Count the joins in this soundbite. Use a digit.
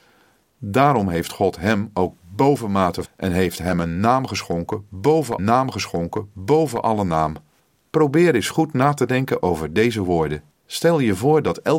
4